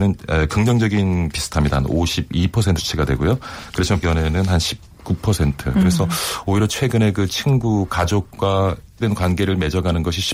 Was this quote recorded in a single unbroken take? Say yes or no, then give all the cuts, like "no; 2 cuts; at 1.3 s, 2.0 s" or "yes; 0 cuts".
no; 4 cuts; at 1.3 s, 2.8 s, 4.0 s, 9.0 s